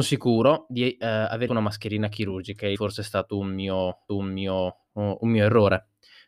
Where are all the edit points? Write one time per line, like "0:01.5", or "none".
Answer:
0:01.5
0:02.8
0:04.1